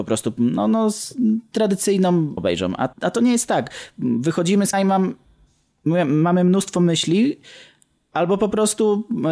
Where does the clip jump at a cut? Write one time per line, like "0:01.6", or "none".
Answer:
0:02.4
0:02.9
0:04.7

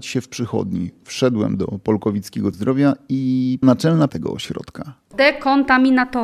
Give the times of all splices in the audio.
0:02.5
0:03.6
0:04.1

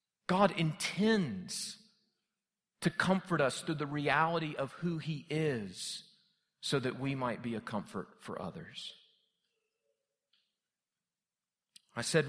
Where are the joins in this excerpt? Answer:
none

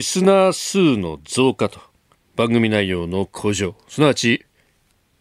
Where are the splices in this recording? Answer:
0:02.1

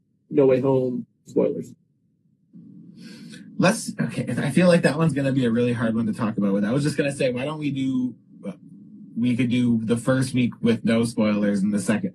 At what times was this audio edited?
0:03.5

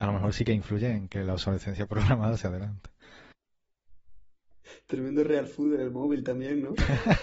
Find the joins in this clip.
none

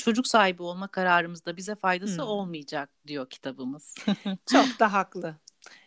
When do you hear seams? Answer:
0:03.0

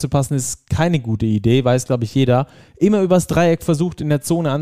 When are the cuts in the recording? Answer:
none

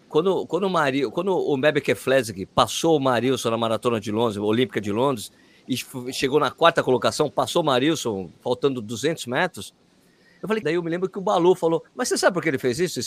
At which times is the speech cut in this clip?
0:10.6
0:11.9

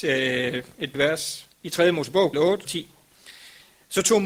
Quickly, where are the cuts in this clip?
0:00.9
0:01.5
0:02.3
0:02.7

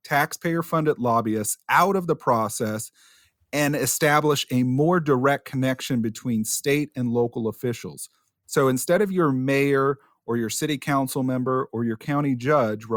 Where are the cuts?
none

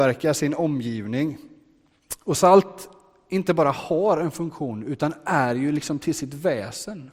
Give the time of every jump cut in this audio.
none

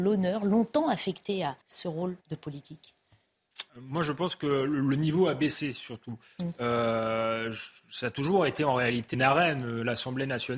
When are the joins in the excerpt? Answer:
0:01.6
0:02.2
0:03.7
0:09.1

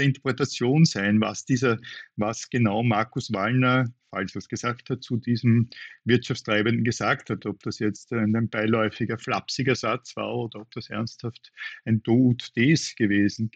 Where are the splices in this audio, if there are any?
0:04.0

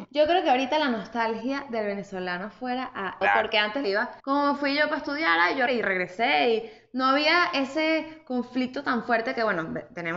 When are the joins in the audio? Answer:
0:03.2
0:03.8
0:04.2
0:05.7

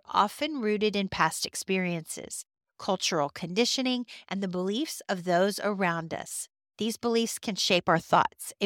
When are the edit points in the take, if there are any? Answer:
none

